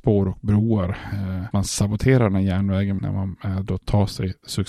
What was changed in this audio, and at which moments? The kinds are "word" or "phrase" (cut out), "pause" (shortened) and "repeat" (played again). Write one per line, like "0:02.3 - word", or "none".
0:01.5 - phrase
0:03.0 - phrase